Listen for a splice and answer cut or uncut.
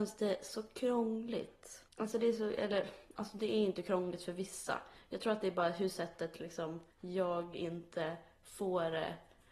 cut